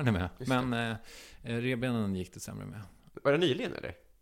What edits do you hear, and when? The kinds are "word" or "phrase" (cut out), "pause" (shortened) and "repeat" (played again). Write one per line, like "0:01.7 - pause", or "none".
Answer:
none